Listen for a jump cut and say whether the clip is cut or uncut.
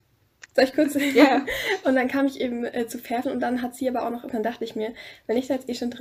cut